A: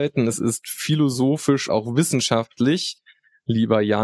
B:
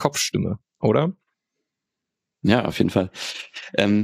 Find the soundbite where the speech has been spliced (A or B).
A